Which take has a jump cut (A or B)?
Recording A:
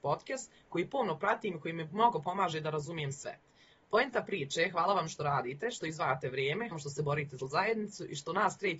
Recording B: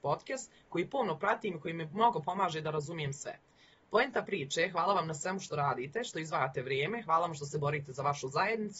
A